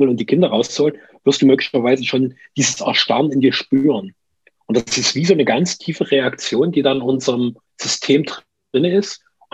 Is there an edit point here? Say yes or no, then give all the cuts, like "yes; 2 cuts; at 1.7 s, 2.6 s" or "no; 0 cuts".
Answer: yes; 1 cut; at 7.6 s